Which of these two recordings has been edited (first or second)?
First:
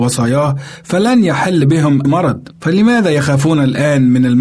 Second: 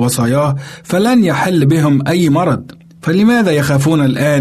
first